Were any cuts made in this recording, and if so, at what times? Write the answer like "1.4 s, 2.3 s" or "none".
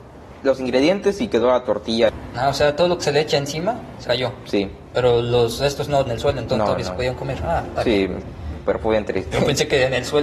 4.1 s, 6.1 s

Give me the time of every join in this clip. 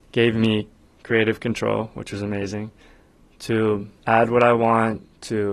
4.0 s

